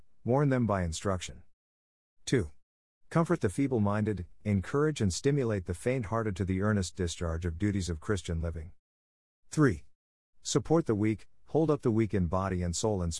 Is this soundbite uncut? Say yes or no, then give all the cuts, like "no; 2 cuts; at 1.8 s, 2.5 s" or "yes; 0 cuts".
yes; 0 cuts